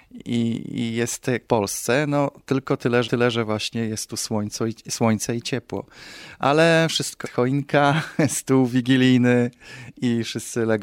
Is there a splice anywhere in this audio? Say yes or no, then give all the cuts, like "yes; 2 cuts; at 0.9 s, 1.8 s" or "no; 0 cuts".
yes; 3 cuts; at 1.5 s, 3.0 s, 7.2 s